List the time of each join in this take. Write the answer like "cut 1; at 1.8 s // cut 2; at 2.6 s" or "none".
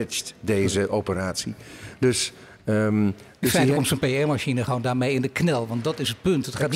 none